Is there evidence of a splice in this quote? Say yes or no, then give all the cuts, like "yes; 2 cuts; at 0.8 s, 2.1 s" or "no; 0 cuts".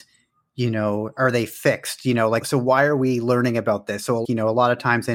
yes; 2 cuts; at 2.4 s, 4.2 s